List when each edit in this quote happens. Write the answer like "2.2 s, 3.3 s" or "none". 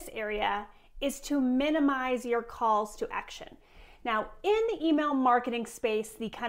none